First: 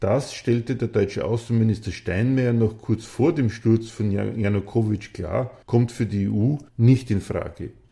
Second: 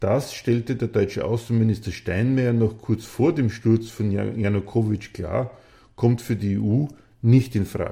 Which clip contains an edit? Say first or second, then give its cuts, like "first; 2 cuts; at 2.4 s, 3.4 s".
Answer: first; 2 cuts; at 5.6 s, 6.7 s